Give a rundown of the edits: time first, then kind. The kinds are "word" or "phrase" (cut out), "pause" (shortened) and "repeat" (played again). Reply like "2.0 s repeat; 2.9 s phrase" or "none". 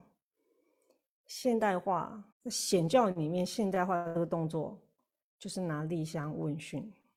2.3 s pause